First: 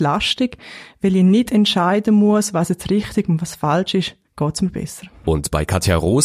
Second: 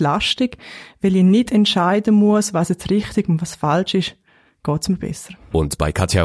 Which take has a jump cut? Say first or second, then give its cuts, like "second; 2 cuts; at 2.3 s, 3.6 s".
first; 1 cut; at 4.2 s